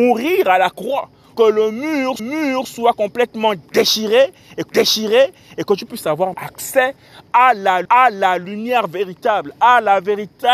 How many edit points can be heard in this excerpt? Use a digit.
5